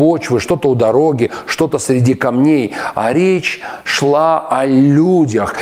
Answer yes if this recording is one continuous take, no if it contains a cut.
yes